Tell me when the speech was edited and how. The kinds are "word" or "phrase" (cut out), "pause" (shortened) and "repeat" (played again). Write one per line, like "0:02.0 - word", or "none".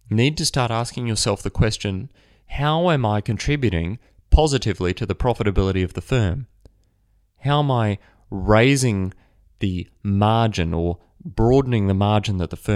none